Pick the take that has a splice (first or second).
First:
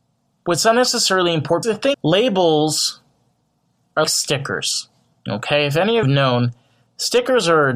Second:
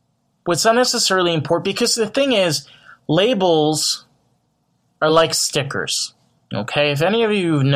first